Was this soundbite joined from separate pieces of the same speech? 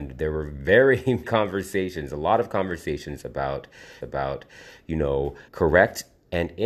yes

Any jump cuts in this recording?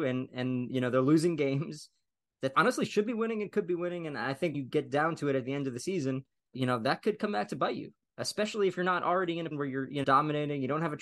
yes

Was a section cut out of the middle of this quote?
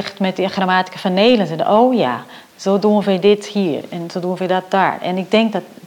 no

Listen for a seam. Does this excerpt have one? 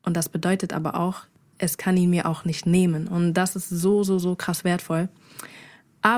no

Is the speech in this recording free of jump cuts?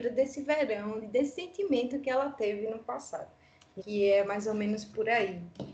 no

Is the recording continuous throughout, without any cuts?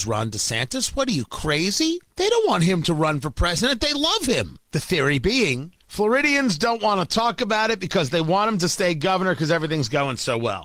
no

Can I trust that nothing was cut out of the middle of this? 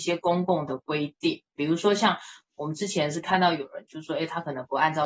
yes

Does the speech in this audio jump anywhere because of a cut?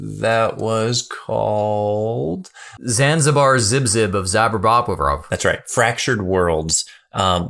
no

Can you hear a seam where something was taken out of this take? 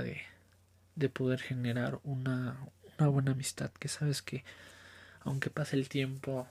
no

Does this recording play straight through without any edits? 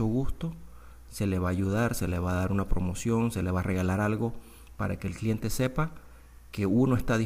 yes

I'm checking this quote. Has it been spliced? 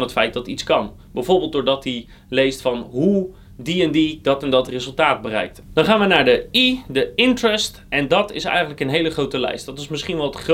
no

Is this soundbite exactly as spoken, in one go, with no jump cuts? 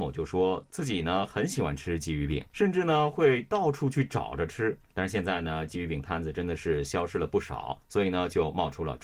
no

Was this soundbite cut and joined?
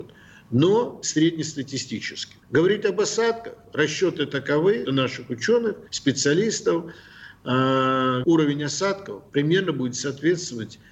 yes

